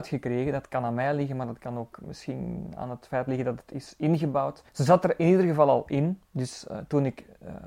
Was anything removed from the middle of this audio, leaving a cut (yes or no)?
yes